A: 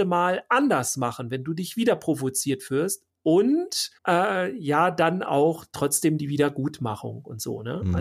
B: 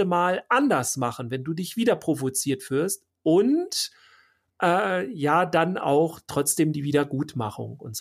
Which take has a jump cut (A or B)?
A